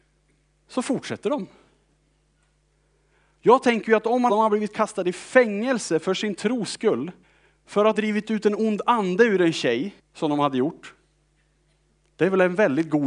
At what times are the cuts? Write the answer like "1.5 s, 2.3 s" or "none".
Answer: 4.3 s, 7.2 s, 7.9 s, 10.0 s